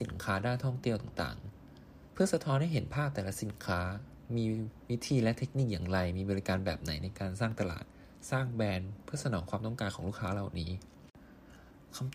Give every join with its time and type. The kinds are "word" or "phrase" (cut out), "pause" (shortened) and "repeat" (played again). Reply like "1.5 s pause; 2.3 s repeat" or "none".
2.1 s word